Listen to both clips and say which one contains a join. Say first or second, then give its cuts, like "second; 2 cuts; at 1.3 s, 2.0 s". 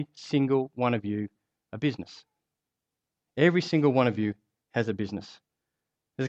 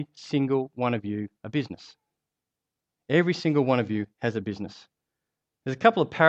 second; 2 cuts; at 1.3 s, 4.1 s